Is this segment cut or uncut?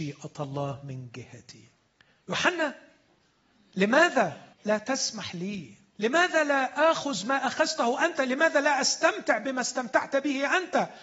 cut